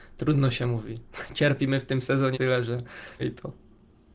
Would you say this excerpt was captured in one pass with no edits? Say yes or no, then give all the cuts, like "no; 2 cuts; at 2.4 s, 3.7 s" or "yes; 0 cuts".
no; 2 cuts; at 2.3 s, 3.2 s